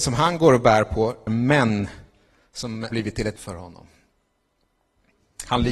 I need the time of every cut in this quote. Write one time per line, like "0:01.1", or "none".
0:01.3
0:02.9
0:03.4